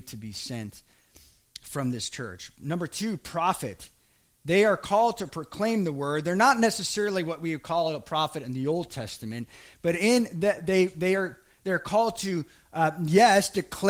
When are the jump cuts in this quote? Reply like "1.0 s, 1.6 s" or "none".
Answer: none